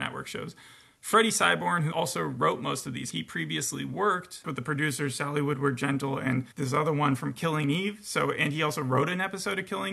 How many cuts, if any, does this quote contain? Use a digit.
3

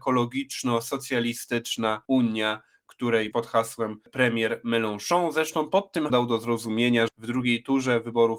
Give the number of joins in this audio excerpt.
4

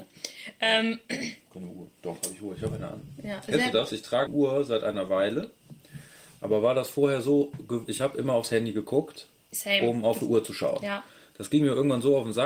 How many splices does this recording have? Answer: 2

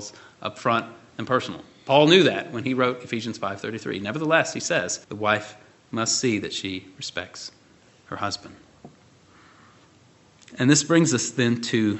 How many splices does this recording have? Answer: 1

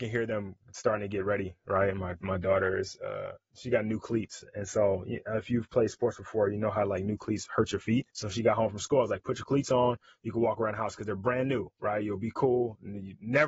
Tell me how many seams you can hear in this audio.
1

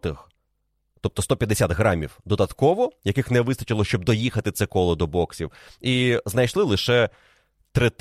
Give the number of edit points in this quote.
0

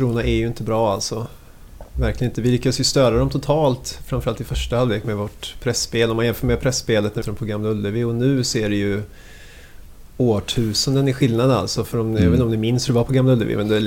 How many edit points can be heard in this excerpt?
1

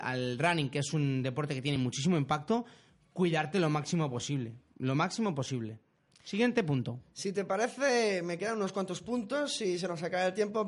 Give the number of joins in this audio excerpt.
0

